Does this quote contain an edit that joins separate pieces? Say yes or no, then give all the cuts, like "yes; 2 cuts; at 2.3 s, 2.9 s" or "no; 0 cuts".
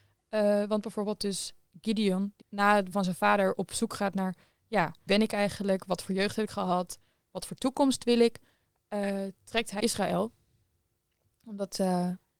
yes; 5 cuts; at 2.4 s, 2.9 s, 5.1 s, 6.5 s, 9.8 s